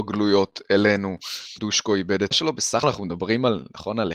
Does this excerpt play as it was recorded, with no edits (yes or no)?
no